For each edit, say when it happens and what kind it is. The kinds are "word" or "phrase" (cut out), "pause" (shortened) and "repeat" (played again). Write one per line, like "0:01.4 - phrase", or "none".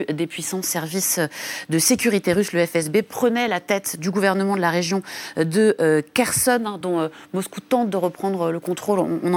none